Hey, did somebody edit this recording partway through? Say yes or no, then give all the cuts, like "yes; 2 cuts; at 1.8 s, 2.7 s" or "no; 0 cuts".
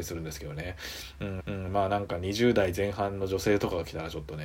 yes; 1 cut; at 1.4 s